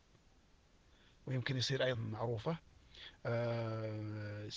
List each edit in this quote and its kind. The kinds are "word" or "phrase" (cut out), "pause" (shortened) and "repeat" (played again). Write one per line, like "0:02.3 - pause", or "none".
0:01.9 - word